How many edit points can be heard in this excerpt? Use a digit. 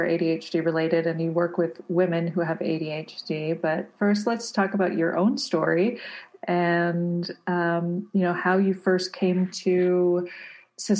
0